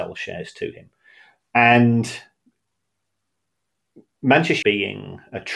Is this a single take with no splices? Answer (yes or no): no